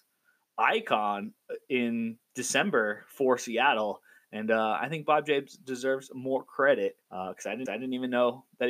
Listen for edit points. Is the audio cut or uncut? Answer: cut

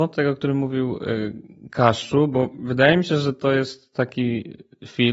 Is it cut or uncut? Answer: uncut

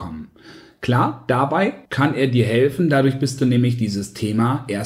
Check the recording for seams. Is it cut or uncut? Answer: cut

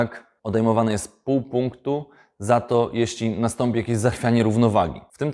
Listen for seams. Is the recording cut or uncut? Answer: uncut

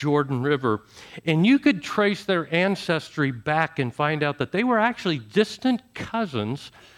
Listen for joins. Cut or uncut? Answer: uncut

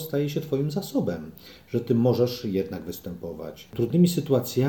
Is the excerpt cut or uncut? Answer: uncut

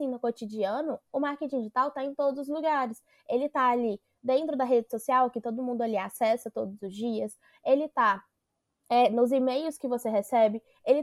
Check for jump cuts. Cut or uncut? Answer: uncut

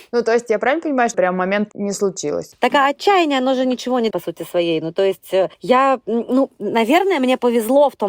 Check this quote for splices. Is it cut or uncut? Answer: cut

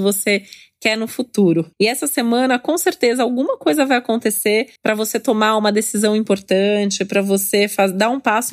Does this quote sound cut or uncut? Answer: cut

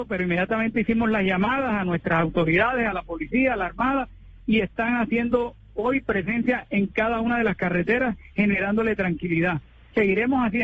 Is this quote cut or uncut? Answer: uncut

